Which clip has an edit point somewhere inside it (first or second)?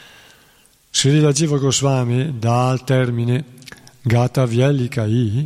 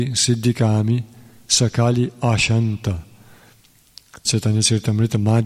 second